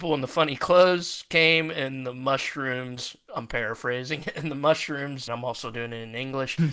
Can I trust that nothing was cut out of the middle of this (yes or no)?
no